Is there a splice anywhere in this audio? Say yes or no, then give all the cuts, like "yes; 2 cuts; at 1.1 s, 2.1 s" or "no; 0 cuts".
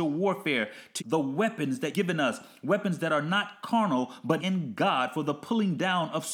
yes; 3 cuts; at 1.0 s, 1.9 s, 4.4 s